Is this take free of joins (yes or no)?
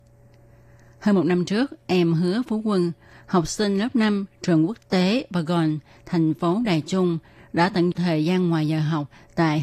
no